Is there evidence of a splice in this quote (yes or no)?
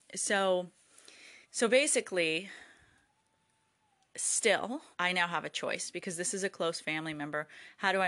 yes